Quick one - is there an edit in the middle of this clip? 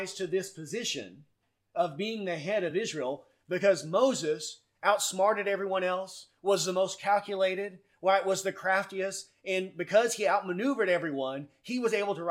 no; 0 cuts

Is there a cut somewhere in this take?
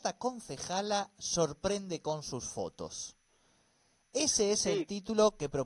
no; 0 cuts

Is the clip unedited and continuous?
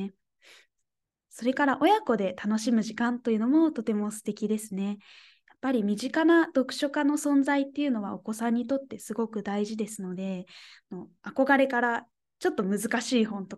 yes; 0 cuts

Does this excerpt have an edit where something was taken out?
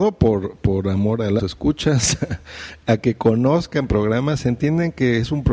yes; 1 cut; at 1.4 s

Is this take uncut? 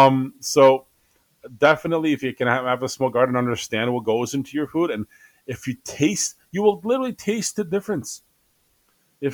yes; 0 cuts

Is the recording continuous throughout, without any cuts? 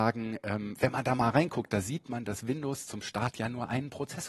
yes; 0 cuts

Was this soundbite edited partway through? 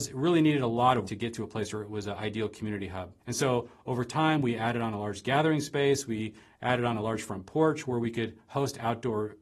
yes; 2 cuts; at 1.0 s, 3.2 s

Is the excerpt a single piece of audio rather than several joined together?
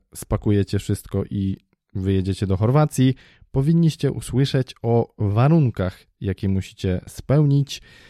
yes; 0 cuts

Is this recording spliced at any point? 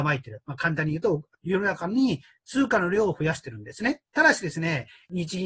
yes; 1 cut; at 4.1 s

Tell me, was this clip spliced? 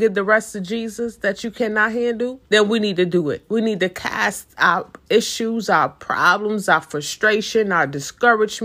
yes; 1 cut; at 2.5 s

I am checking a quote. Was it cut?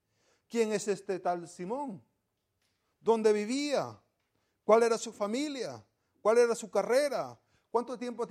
no; 0 cuts

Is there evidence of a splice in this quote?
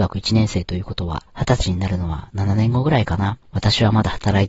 yes; 2 cuts; at 1.3 s, 3.4 s

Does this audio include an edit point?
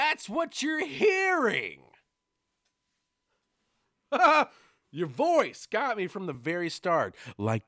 no; 0 cuts

